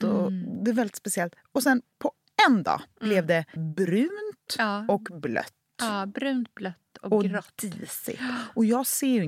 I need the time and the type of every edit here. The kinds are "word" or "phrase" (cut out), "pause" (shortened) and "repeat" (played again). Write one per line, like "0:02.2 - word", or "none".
0:01.9 - pause
0:03.6 - word